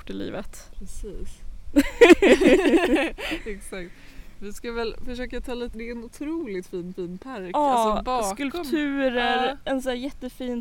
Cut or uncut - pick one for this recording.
cut